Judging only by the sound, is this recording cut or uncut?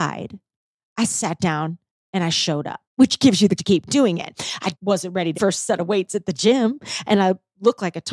cut